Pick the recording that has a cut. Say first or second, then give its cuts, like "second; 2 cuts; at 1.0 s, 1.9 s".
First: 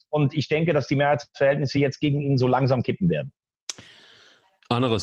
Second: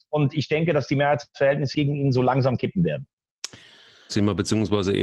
second; 2 cuts; at 1.7 s, 4.1 s